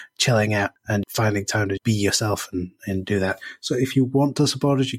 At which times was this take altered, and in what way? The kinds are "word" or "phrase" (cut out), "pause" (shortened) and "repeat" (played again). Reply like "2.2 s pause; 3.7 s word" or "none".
1.0 s word; 1.8 s word